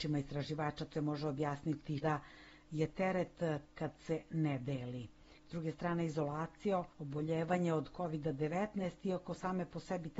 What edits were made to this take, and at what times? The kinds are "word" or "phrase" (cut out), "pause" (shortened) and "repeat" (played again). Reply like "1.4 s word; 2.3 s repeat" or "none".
0.9 s word; 2.0 s word; 3.7 s word; 6.9 s pause